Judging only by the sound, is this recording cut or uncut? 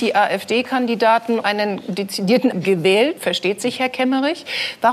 cut